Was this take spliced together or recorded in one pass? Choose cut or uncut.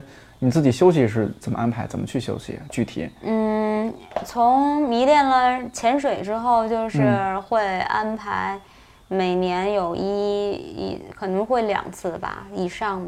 uncut